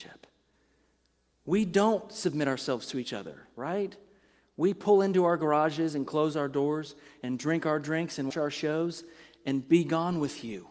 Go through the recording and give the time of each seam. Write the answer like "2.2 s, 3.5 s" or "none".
8.3 s

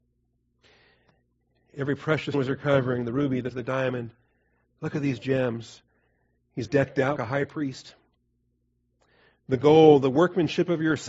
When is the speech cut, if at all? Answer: 2.3 s, 3.5 s, 6.6 s, 7.2 s

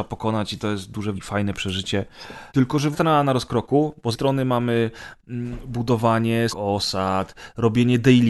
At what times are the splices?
1.1 s, 2.5 s, 2.9 s, 4.1 s, 6.5 s

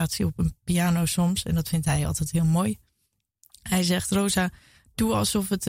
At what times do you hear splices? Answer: none

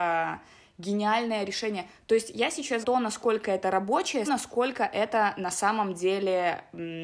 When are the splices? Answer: 2.8 s, 4.3 s

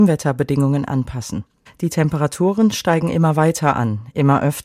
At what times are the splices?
none

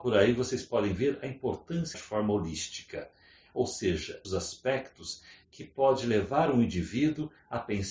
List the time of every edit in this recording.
1.9 s, 4.2 s

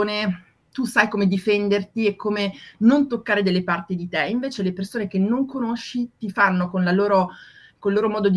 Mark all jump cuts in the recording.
none

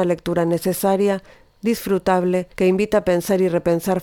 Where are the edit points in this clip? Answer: 2.5 s

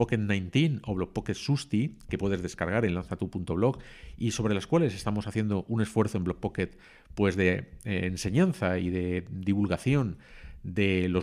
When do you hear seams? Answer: none

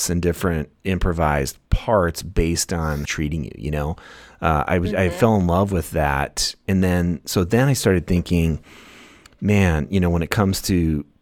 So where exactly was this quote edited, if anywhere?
3.1 s

